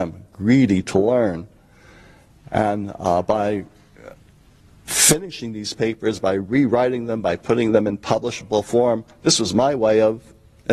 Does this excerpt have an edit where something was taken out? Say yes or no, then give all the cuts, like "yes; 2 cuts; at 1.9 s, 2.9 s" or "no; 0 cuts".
no; 0 cuts